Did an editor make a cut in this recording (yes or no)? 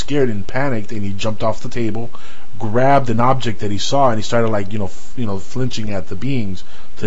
no